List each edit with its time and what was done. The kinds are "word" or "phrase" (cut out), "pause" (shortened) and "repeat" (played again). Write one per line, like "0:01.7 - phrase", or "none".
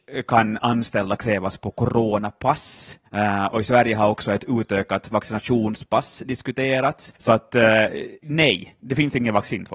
0:03.1 - pause
0:07.2 - pause